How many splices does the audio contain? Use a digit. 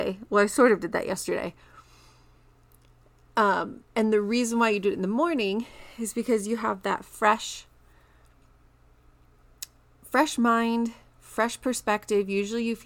1